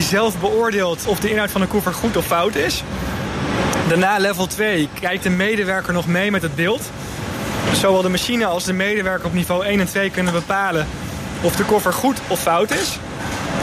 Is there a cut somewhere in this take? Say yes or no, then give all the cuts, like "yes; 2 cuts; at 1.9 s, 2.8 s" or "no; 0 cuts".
yes; 1 cut; at 1.0 s